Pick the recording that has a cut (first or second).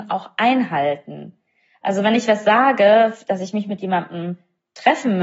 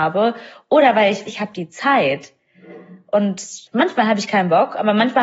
second